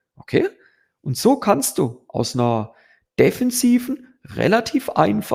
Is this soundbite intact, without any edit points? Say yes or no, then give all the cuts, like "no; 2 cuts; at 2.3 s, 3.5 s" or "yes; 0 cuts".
yes; 0 cuts